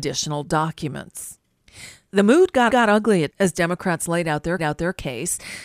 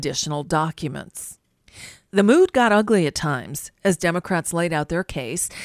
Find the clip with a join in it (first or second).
first